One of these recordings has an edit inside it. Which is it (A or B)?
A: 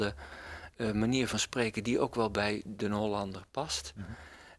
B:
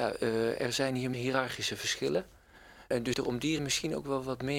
B